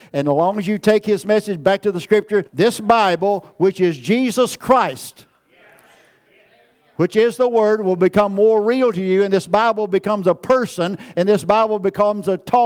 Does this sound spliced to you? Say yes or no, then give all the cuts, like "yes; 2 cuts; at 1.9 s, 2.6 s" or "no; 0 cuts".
yes; 1 cut; at 2.5 s